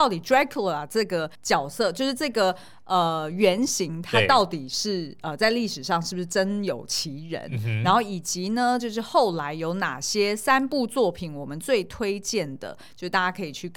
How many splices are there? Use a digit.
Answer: 1